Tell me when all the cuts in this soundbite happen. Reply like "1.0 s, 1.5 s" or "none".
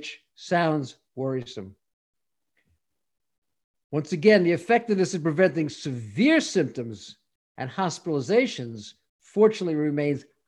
none